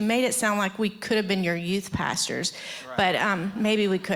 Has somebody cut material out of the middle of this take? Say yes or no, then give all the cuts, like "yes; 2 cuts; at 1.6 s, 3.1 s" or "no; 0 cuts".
no; 0 cuts